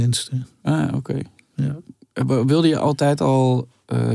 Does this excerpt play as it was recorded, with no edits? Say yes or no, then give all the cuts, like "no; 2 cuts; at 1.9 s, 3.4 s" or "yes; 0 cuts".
yes; 0 cuts